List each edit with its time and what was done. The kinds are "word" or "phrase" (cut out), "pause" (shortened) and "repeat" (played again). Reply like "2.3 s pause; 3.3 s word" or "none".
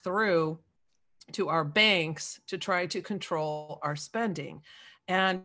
none

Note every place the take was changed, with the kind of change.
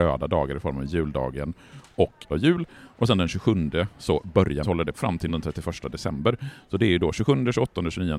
2.3 s word; 4.6 s word; 4.9 s word; 5.3 s word

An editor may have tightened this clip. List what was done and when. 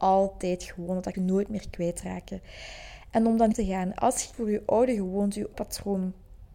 1.1 s word; 3.5 s phrase; 4.3 s word; 5.5 s word

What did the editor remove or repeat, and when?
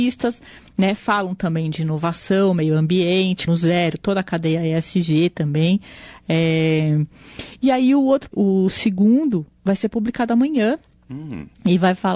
3.5 s word; 8.3 s word

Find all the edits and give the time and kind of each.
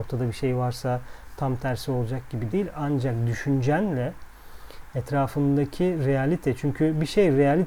2.5 s word

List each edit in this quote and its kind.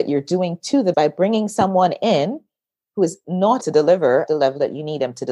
0.9 s word; 3.6 s word; 4.3 s word

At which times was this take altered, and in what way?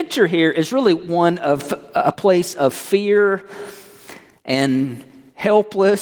none

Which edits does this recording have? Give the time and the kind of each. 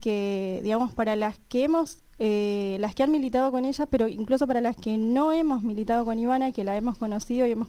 none

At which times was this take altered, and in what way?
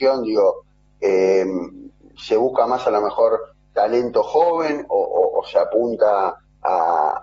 none

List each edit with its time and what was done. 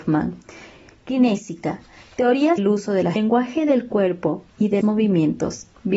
2.6 s word; 3.2 s phrase; 4.5 s pause; 4.8 s word

